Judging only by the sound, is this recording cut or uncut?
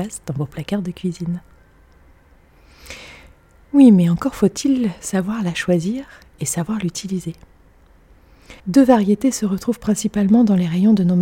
cut